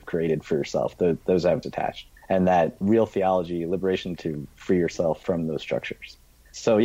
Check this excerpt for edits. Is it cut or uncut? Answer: cut